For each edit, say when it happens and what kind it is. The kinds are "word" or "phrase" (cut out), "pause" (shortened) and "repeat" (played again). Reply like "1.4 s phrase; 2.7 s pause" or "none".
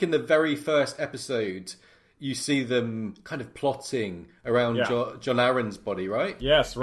none